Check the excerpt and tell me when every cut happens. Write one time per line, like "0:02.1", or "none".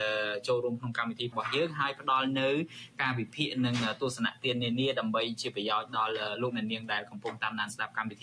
0:01.3